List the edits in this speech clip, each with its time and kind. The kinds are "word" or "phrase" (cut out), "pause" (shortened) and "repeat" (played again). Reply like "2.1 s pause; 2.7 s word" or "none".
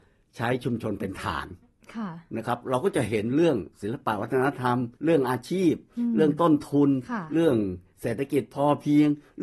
5.0 s pause